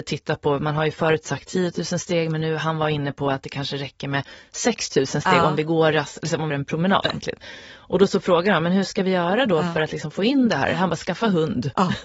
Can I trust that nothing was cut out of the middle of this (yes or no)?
no